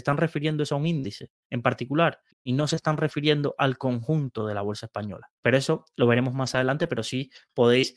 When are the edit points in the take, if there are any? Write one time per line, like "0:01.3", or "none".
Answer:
0:02.3